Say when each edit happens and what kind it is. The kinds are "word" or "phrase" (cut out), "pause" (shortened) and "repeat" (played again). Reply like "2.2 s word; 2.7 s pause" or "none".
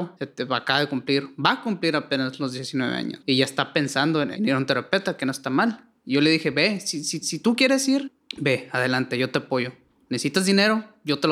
4.3 s word; 7.2 s repeat

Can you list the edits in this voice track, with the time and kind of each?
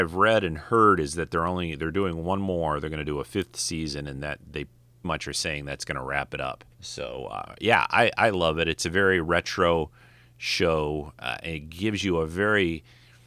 5.0 s word; 6.7 s pause

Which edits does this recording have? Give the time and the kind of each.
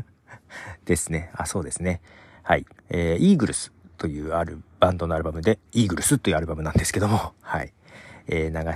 2.8 s pause; 5.6 s pause

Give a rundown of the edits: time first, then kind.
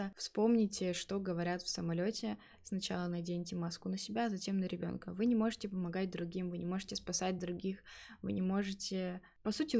none

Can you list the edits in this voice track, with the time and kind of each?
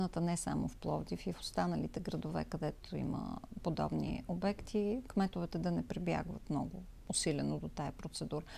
7.0 s pause

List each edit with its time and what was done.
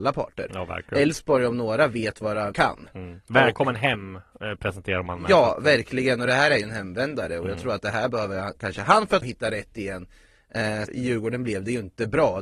2.5 s word; 9.2 s phrase; 10.9 s phrase

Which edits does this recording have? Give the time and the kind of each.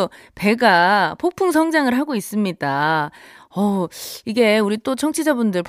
none

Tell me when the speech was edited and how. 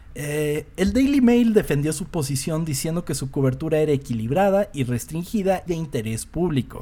5.7 s word

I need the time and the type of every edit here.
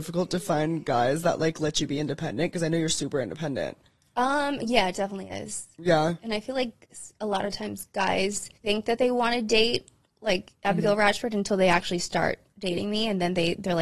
8.5 s pause

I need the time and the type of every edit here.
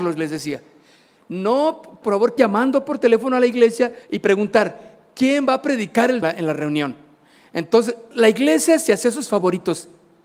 2.0 s word; 2.4 s word; 4.0 s pause; 6.2 s phrase; 8.1 s word

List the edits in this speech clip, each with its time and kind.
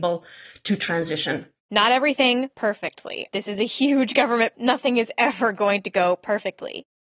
1.6 s word; 2.5 s word; 3.3 s word; 4.5 s word

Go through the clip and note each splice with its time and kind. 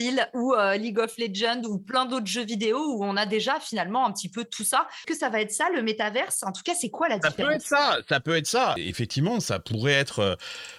none

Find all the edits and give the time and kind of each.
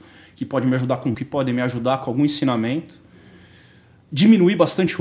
1.1 s word

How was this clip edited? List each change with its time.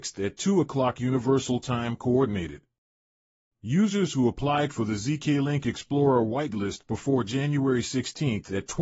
none

